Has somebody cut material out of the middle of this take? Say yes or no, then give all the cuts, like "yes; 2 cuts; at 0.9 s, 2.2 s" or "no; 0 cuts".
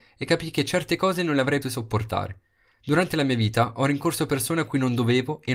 yes; 1 cut; at 1.6 s